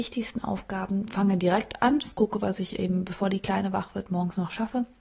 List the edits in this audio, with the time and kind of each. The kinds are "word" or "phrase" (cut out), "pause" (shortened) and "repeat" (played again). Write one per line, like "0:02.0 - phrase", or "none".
none